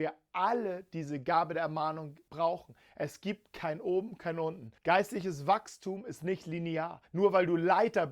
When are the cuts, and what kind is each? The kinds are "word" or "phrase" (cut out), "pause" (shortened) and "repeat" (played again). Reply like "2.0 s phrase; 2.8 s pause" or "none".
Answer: 4.8 s pause; 7.0 s pause

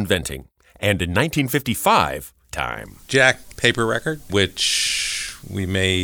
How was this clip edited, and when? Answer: 2.5 s phrase; 3.5 s phrase

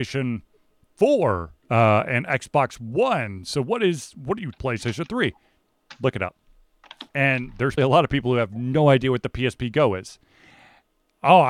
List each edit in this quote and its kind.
1.6 s pause; 4.6 s phrase; 7.1 s pause; 7.8 s word

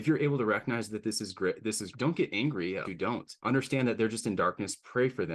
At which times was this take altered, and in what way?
1.9 s word; 2.8 s word; 3.4 s pause

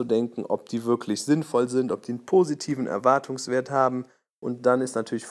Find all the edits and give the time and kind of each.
none

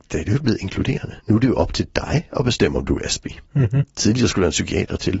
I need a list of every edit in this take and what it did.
1.2 s pause

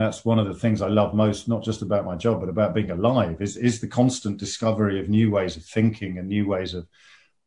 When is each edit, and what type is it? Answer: none

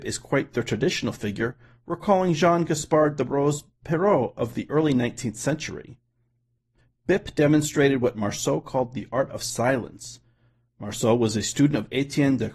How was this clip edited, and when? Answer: none

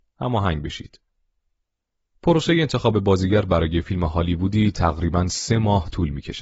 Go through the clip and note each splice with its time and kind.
none

